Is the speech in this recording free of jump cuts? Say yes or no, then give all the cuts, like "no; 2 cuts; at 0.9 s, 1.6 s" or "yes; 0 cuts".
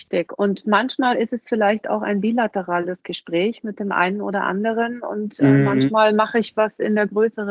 yes; 0 cuts